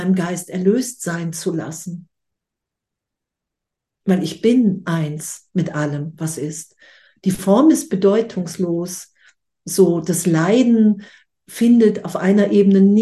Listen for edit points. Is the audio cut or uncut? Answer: uncut